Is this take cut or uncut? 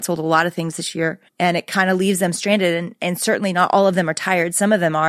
cut